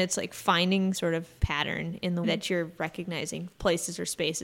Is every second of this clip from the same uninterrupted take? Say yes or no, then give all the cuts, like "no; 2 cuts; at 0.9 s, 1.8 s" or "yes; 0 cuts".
no; 4 cuts; at 0.9 s, 1.4 s, 2.2 s, 3.5 s